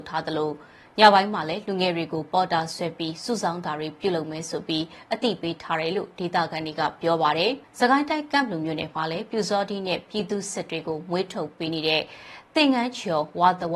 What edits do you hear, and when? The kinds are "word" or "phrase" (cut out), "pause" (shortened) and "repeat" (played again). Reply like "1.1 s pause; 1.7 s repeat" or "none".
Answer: 7.6 s pause